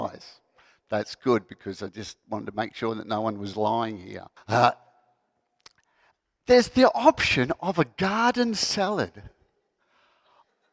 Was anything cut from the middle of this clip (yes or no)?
yes